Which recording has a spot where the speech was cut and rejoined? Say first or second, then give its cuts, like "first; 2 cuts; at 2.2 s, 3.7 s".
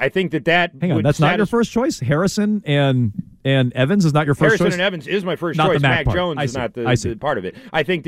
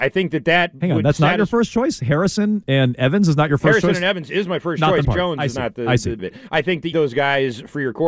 second; 4 cuts; at 2.6 s, 5.0 s, 6.2 s, 6.9 s